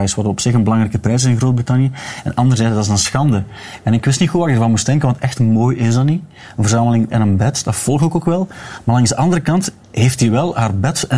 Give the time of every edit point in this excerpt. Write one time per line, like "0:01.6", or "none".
0:07.1
0:09.8